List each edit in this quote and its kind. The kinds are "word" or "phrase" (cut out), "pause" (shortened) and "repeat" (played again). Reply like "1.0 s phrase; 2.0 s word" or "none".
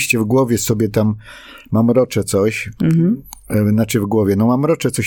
none